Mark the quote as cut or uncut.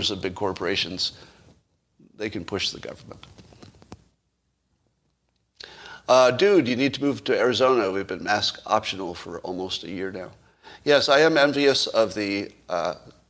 uncut